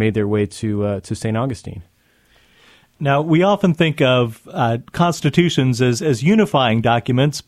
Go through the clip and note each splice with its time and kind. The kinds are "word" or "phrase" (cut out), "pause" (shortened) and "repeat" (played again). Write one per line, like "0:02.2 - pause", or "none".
none